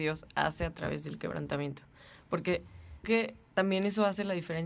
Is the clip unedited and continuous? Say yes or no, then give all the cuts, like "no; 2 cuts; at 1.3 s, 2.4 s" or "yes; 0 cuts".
no; 1 cut; at 3.0 s